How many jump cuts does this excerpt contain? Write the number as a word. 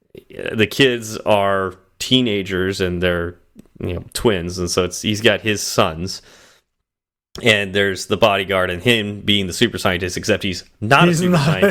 zero